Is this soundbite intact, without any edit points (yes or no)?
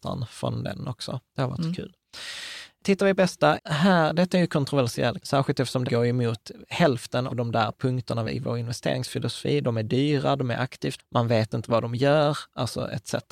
no